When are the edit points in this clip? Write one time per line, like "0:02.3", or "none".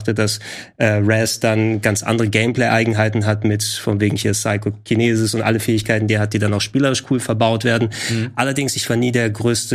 none